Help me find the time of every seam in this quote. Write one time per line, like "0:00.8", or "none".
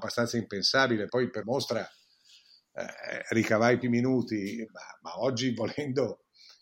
0:01.1
0:01.4
0:03.8
0:04.7

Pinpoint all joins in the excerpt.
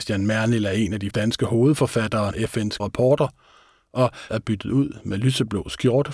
0:01.1
0:02.3
0:02.8
0:04.3

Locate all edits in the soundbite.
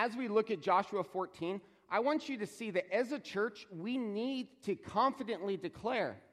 none

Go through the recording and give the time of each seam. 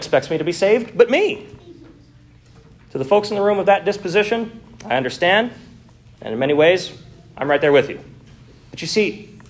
none

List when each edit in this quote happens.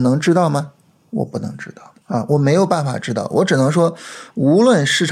0:02.0

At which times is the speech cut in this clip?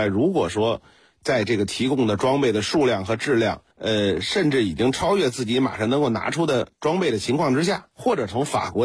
0:03.7
0:07.9

